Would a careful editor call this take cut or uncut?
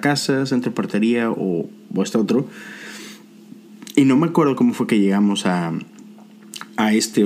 uncut